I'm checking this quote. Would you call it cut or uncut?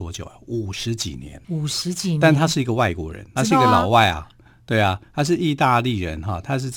cut